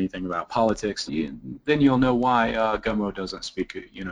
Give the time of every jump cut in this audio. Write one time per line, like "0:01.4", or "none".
0:01.1